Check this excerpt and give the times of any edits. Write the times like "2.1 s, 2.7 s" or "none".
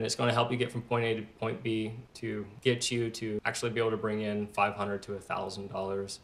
none